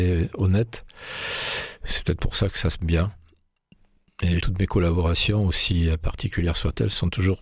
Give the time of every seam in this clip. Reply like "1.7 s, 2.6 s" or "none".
2.8 s, 4.4 s